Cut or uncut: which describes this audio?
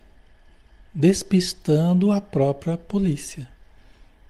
uncut